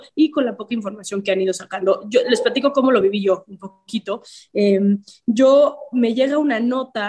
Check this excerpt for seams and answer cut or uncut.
uncut